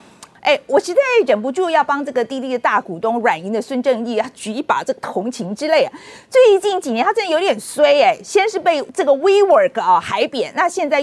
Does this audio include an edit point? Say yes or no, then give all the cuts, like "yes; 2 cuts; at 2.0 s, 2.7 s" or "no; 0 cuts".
no; 0 cuts